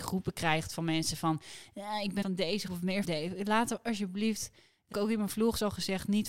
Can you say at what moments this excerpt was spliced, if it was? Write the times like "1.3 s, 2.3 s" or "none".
2.2 s, 2.7 s, 3.0 s, 4.9 s